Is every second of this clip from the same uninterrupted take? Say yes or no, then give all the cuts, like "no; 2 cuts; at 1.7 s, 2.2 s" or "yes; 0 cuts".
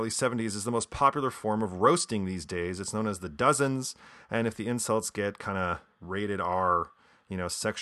yes; 0 cuts